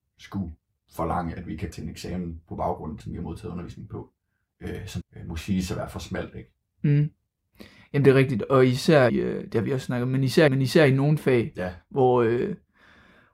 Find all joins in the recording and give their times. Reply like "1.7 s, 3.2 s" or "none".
1.7 s, 3.0 s, 5.0 s, 9.1 s, 10.5 s